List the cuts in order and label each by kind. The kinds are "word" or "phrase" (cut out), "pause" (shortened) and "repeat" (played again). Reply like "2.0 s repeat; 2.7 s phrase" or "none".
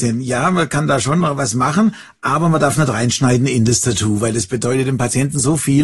none